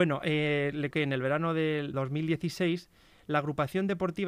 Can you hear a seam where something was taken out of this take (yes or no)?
yes